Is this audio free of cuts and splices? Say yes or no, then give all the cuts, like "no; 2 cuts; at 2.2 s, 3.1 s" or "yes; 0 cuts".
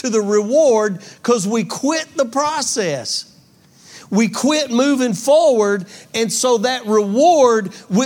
yes; 0 cuts